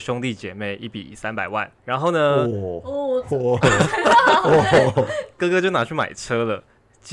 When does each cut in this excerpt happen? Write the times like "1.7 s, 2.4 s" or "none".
1.8 s, 5.4 s